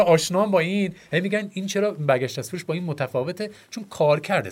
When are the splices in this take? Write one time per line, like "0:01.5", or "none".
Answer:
none